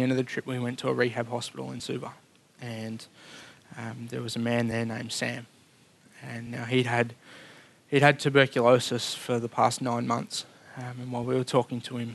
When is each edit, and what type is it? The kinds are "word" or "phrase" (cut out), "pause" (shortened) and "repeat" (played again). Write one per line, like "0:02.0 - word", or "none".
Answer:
none